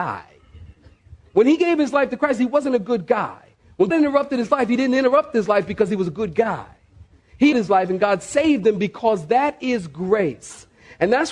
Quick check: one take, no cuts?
no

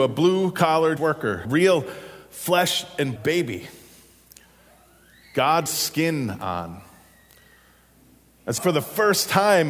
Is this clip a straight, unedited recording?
no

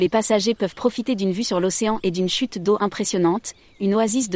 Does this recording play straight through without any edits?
yes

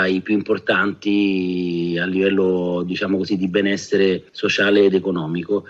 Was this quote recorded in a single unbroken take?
yes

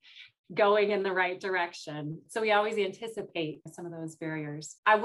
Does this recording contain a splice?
no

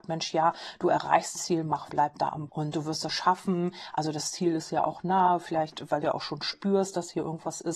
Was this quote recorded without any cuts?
no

